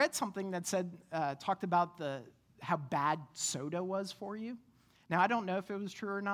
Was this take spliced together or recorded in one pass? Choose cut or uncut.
uncut